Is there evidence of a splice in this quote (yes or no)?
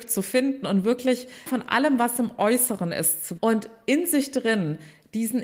yes